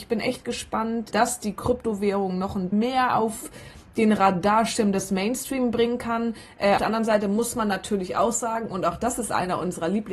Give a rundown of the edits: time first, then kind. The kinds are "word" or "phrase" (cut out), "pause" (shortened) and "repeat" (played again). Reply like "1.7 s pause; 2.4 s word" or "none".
1.1 s word; 2.7 s word; 6.8 s word